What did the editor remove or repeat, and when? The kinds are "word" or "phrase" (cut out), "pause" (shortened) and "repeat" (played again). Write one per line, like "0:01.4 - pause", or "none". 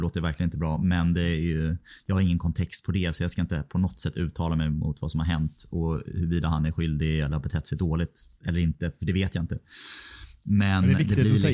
none